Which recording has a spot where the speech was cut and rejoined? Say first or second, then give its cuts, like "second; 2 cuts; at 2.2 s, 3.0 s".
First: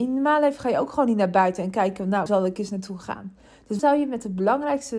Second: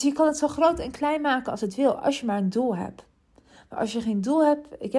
first; 2 cuts; at 2.3 s, 3.8 s